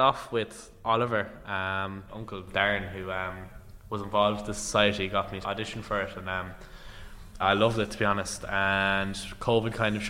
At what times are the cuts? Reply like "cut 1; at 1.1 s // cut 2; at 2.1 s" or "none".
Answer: cut 1; at 2.1 s // cut 2; at 5.4 s // cut 3; at 7.4 s